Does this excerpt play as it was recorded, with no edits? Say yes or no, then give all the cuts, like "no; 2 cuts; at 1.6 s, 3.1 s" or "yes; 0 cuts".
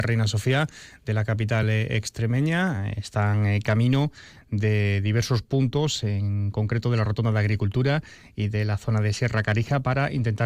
yes; 0 cuts